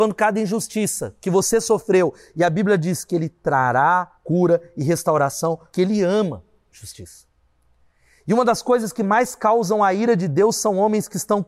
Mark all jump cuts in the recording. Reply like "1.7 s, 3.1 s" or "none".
4.2 s, 5.7 s